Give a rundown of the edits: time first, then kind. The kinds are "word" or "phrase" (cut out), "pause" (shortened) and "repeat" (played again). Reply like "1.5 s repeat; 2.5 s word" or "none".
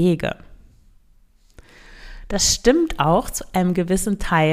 none